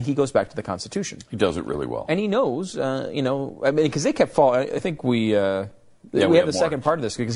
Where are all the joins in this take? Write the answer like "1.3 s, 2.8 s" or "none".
none

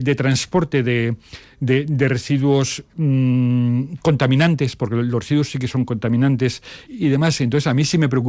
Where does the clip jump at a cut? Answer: 6.9 s

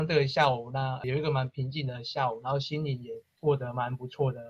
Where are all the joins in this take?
1.0 s, 3.3 s

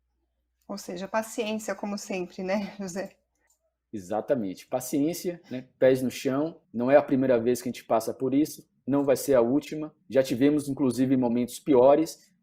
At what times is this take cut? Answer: 3.5 s, 6.6 s, 10.0 s

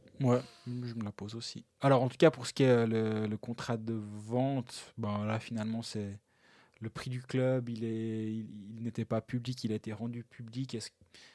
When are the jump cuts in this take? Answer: none

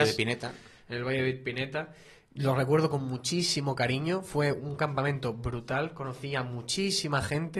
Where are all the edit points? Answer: none

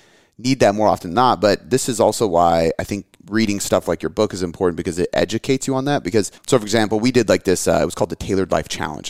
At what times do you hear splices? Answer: 6.4 s

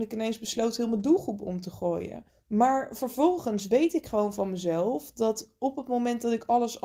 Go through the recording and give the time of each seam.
2.3 s

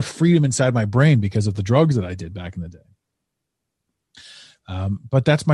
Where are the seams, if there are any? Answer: none

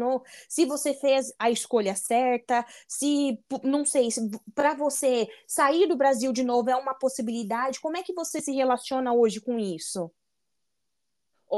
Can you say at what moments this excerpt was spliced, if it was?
none

